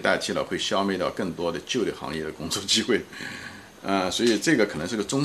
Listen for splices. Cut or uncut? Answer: uncut